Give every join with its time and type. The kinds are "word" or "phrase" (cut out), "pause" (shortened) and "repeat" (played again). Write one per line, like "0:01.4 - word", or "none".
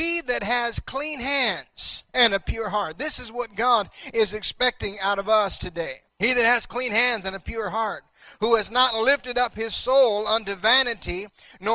0:02.1 - pause
0:06.1 - pause

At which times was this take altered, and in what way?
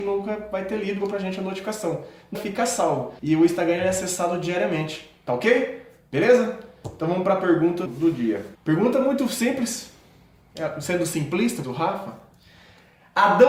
0:01.0 - phrase
0:02.3 - word
0:03.2 - pause
0:07.9 - word
0:08.5 - pause
0:11.6 - phrase

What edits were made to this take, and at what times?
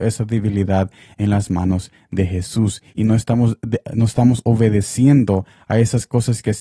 none

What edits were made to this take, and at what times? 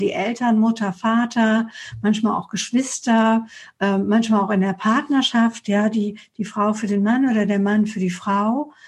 none

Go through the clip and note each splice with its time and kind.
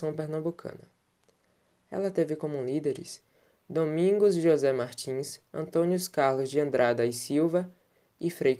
none

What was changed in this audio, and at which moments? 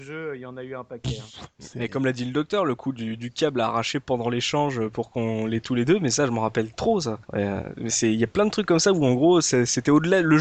0:07.2 - pause

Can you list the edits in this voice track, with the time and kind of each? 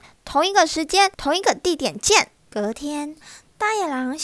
0:01.1 - pause
0:02.4 - pause

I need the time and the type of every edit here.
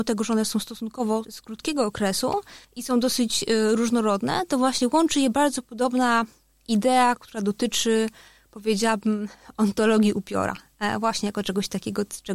0:01.2 - word
0:02.6 - pause

